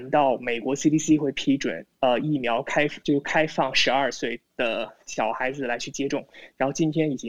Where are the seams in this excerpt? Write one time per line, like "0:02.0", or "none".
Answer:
0:01.9
0:03.0